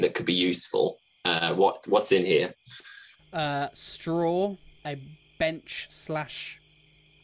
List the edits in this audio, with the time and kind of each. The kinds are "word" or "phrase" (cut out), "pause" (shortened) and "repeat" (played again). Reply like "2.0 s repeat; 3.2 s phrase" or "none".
4.8 s pause